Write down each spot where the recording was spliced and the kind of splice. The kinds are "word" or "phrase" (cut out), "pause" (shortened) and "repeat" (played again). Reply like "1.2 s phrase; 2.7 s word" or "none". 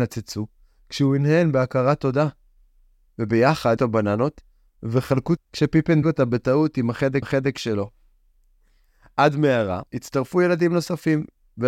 3.8 s phrase; 5.4 s word; 6.0 s word; 7.2 s repeat; 9.9 s pause